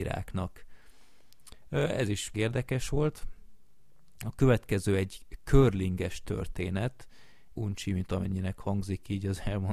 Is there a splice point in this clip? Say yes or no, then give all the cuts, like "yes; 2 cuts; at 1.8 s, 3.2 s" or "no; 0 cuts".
yes; 2 cuts; at 2.3 s, 7.5 s